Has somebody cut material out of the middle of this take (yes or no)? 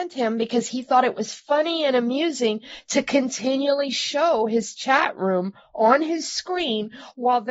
no